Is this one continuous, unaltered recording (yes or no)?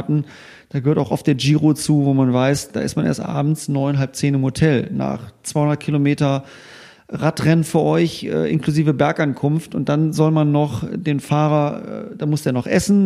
yes